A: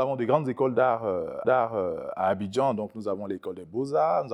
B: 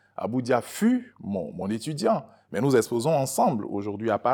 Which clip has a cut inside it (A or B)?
A